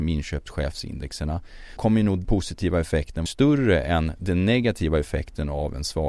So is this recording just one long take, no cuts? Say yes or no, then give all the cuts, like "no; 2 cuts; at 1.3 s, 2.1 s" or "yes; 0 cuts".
no; 3 cuts; at 1.8 s, 2.2 s, 3.3 s